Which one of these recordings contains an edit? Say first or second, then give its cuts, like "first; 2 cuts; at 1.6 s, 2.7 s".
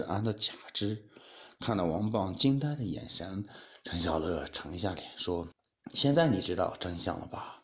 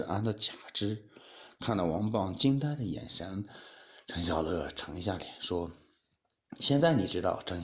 first; 2 cuts; at 3.7 s, 5.5 s